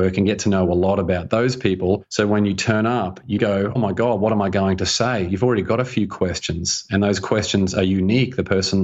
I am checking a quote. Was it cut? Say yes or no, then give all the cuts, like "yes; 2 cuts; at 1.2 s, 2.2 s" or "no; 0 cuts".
yes; 2 cuts; at 3.4 s, 3.8 s